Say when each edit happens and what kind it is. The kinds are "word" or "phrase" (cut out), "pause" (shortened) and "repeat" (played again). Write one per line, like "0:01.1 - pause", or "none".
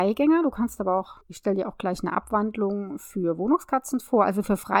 0:01.2 - pause